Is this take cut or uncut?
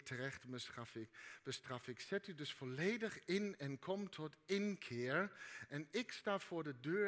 uncut